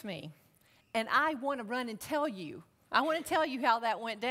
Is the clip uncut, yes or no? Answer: yes